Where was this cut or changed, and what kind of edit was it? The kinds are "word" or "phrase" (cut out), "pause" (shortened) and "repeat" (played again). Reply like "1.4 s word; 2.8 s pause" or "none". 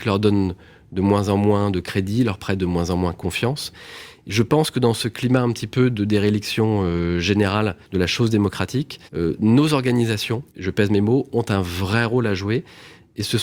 7.8 s pause; 9.1 s pause; 10.5 s pause